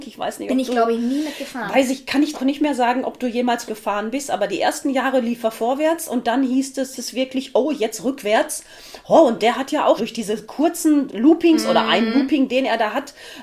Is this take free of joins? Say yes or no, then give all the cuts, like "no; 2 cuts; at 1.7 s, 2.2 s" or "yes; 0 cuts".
no; 5 cuts; at 2.3 s, 3.7 s, 7.0 s, 10.0 s, 11.1 s